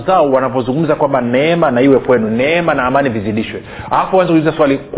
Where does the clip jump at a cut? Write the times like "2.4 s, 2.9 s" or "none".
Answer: none